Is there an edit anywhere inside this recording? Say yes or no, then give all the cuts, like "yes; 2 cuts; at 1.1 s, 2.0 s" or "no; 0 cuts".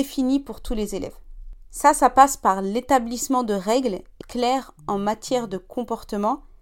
yes; 1 cut; at 4.2 s